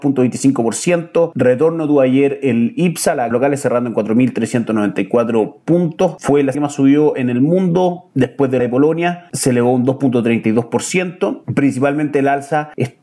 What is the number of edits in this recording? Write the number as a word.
five